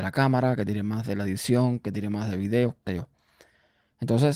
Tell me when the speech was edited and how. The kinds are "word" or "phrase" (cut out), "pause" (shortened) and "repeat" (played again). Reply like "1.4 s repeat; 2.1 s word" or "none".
2.9 s word